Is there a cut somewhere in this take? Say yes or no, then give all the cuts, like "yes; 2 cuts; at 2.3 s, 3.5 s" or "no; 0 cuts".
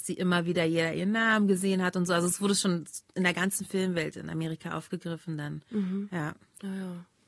no; 0 cuts